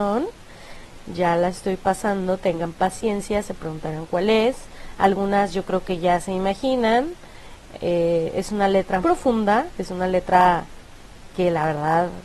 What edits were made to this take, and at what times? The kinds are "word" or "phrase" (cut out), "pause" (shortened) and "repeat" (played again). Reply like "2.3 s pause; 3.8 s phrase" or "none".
9.0 s word